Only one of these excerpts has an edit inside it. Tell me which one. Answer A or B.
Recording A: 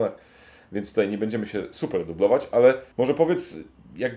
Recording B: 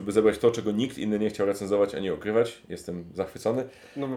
A